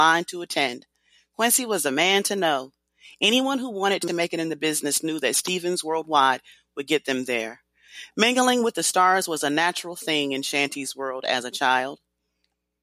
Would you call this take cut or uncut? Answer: uncut